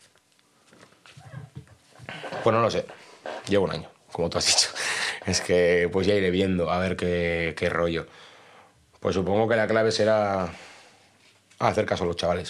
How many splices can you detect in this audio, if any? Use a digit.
0